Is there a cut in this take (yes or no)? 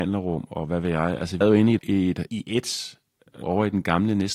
yes